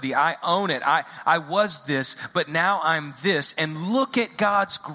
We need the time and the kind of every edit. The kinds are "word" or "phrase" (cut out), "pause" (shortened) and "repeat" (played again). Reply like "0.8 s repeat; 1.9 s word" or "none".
none